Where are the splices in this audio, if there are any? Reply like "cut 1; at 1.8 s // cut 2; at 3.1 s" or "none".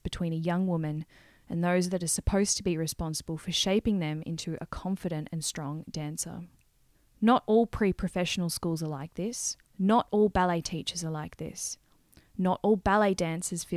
cut 1; at 6.9 s // cut 2; at 9.7 s